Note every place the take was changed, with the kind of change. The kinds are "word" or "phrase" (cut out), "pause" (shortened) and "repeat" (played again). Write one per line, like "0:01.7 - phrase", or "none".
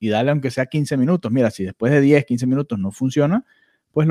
none